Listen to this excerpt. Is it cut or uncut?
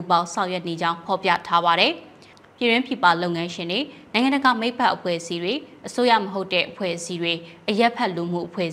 uncut